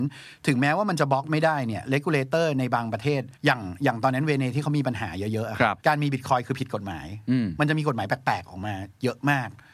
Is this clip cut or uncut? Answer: cut